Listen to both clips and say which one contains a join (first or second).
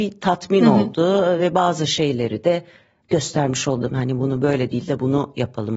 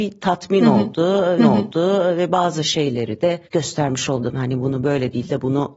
second